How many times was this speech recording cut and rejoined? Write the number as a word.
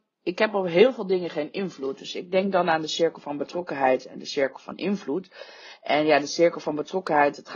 zero